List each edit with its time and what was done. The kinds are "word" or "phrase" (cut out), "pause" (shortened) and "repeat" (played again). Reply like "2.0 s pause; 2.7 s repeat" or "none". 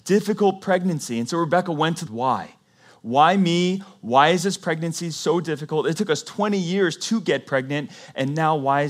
2.1 s phrase

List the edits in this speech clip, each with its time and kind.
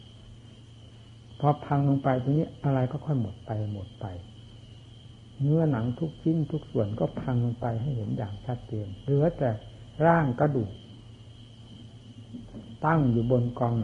none

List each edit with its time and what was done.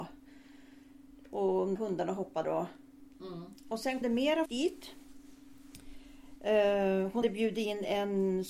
1.8 s word; 2.4 s word; 4.0 s word; 4.5 s word; 7.2 s word

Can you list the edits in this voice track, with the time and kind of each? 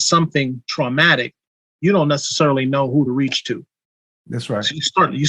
none

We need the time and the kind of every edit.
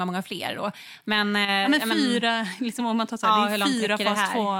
none

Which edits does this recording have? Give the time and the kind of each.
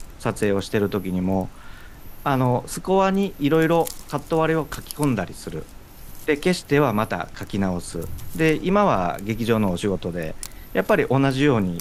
6.3 s phrase

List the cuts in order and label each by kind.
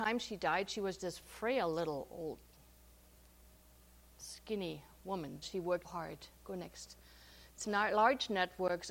1.0 s word; 5.4 s word; 5.8 s word; 7.6 s word

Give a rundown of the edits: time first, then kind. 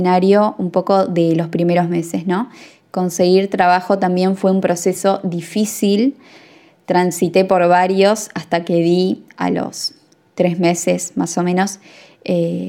none

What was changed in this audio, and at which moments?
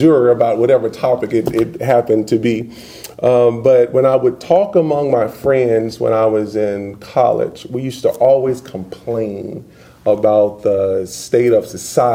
none

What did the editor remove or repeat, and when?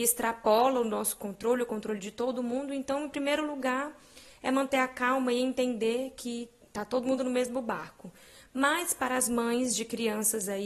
none

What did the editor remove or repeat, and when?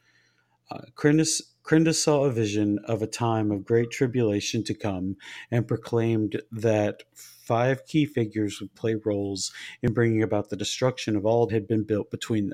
11.5 s word

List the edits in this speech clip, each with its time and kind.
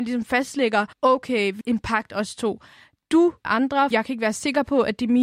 0.9 s pause; 1.6 s word; 3.4 s phrase; 3.9 s word

